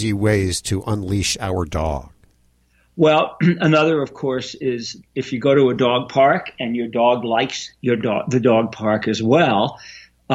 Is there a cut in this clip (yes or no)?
no